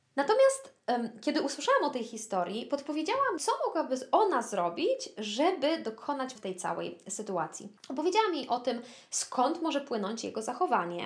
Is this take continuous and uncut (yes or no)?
no